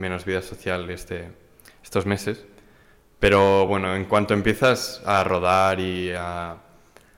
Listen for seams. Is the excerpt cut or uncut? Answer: uncut